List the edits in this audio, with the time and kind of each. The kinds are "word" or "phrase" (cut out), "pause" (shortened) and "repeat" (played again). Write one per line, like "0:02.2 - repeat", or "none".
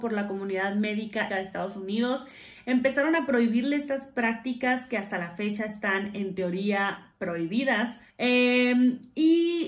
0:01.3 - phrase
0:08.1 - pause